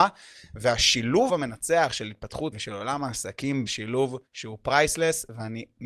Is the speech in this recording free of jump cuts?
no; 4 cuts; at 1.3 s, 2.5 s, 3.7 s, 4.3 s

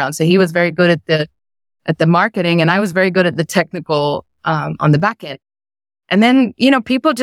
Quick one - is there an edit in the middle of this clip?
no; 0 cuts

